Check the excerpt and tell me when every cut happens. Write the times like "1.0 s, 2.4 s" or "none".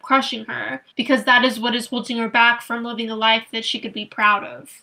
0.9 s

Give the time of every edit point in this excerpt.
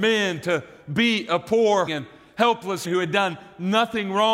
1.9 s, 2.8 s

